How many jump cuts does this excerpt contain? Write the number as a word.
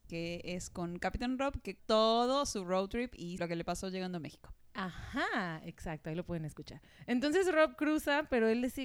two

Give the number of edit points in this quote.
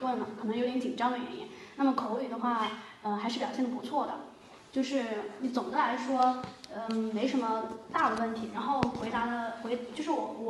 zero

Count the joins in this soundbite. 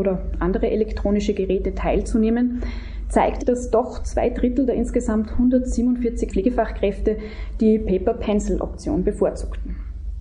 two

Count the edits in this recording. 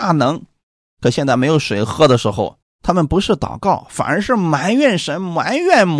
one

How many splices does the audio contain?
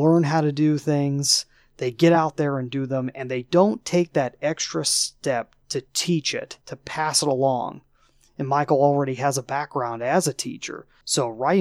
zero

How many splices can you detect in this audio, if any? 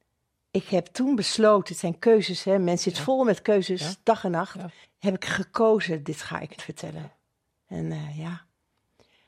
two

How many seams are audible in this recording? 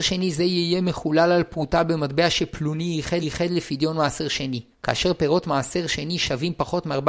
two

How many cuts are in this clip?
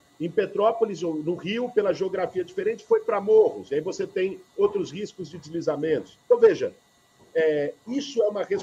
one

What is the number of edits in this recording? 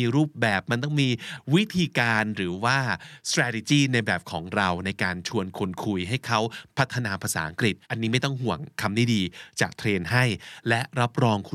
one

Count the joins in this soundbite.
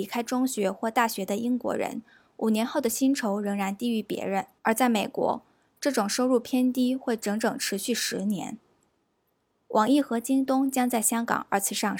one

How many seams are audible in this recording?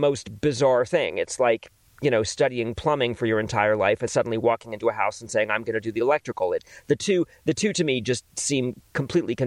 one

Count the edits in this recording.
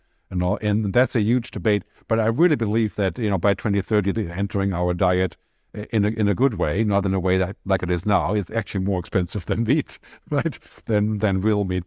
one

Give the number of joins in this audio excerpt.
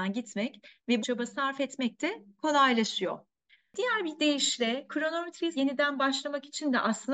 two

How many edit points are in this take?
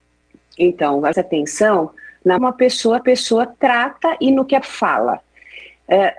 four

